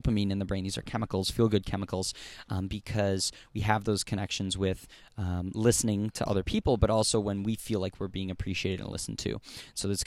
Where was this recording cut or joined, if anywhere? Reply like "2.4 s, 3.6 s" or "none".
none